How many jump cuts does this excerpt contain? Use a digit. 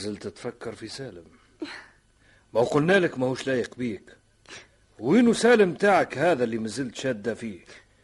0